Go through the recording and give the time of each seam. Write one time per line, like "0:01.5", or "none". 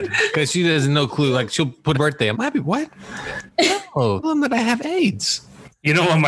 0:01.9
0:02.3
0:04.2